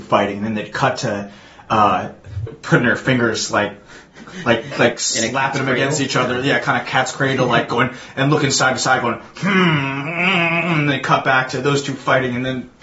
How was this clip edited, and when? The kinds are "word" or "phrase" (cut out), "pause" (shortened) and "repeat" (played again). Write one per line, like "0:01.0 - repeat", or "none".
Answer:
0:02.5 - phrase